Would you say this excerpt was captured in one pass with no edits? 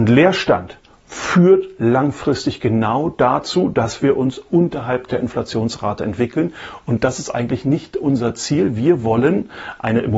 yes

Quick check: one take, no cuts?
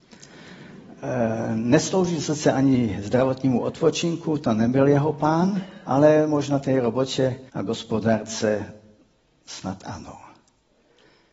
no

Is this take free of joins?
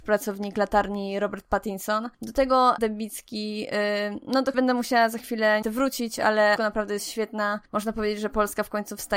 no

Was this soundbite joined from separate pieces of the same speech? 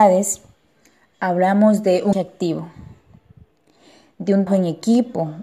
yes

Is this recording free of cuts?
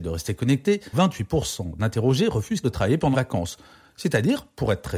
no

